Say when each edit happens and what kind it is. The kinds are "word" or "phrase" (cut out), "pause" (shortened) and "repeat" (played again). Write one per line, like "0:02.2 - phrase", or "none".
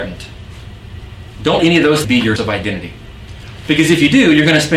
0:01.6 - word
0:02.0 - word
0:02.4 - word